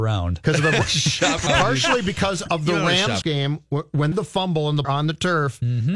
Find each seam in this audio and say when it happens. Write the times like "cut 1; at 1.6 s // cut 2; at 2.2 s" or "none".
cut 1; at 1.5 s // cut 2; at 3.2 s // cut 3; at 4.1 s // cut 4; at 4.8 s